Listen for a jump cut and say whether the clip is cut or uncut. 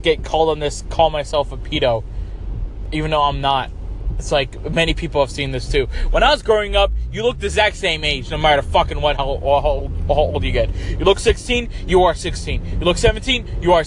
uncut